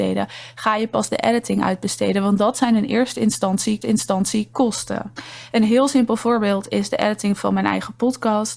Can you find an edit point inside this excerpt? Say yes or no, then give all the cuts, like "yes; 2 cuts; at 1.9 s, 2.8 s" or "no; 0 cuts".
yes; 1 cut; at 3.8 s